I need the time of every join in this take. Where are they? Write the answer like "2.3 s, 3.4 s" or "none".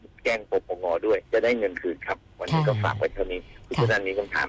1.2 s